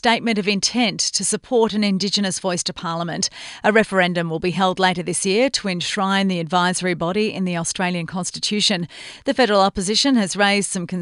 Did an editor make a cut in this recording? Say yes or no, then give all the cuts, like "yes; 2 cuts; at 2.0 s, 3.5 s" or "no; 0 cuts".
no; 0 cuts